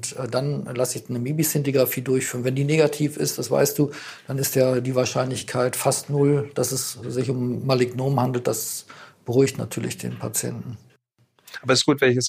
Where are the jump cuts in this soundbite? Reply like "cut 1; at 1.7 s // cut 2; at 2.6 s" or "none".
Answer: none